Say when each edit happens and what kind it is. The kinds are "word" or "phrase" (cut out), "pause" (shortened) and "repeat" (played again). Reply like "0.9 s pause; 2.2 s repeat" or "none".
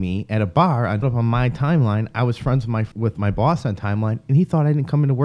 1.0 s phrase; 2.9 s pause